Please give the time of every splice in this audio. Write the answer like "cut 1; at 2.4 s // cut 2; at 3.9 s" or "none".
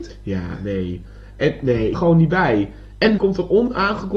cut 1; at 1.9 s // cut 2; at 3.2 s